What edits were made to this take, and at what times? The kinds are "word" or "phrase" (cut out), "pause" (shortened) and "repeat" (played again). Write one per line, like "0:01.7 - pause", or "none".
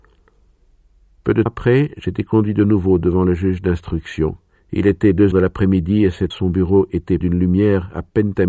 0:01.5 - word
0:04.6 - pause
0:05.3 - word
0:06.3 - word
0:07.2 - word